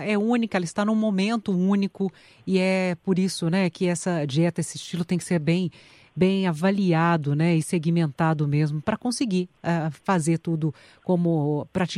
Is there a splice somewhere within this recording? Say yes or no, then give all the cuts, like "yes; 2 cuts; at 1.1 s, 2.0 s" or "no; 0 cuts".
no; 0 cuts